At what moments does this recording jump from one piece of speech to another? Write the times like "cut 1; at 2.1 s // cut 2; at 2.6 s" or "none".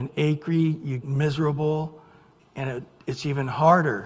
cut 1; at 1.0 s // cut 2; at 2.4 s